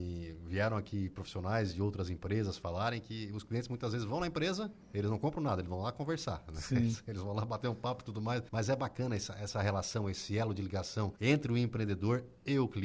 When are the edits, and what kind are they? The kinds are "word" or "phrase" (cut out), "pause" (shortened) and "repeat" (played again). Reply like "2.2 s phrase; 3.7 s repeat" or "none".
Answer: 4.8 s pause; 8.5 s pause; 11.2 s pause

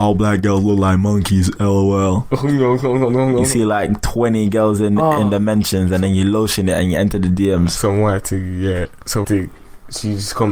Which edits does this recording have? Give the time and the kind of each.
9.2 s word

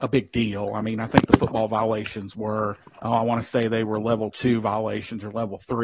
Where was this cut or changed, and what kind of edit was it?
2.8 s pause

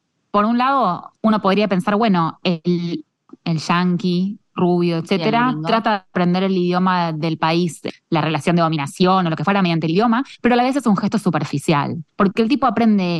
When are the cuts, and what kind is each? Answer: 1.2 s pause; 12.1 s pause

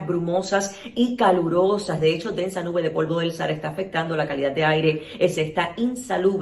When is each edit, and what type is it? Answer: 5.4 s word

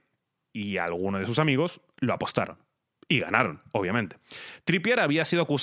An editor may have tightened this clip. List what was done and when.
none

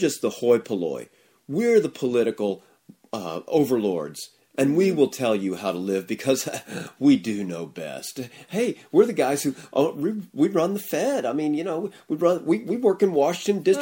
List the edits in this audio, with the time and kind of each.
none

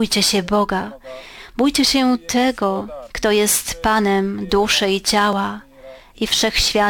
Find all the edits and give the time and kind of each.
3.1 s pause

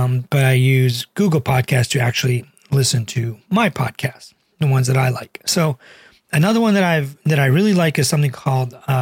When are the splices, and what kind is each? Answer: none

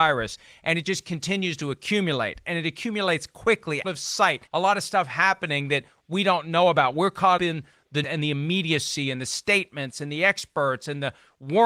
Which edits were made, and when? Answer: 3.8 s word; 4.5 s pause; 7.4 s word; 8.0 s word

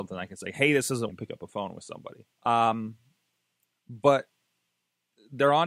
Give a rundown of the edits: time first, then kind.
1.1 s word; 2.3 s pause

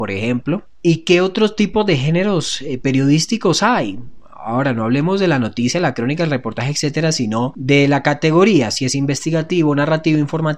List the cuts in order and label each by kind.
none

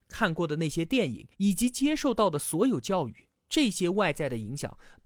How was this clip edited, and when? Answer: 1.3 s pause

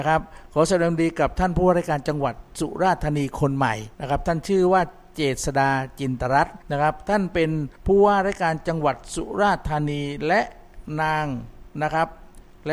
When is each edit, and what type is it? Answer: 3.9 s pause; 6.6 s pause; 7.8 s pause

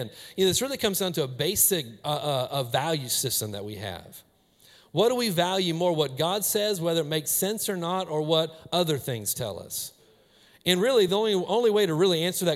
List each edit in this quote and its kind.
none

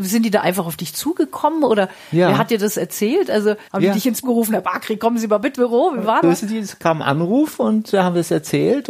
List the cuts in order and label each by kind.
3.7 s pause; 4.2 s word; 5.5 s word; 6.2 s phrase

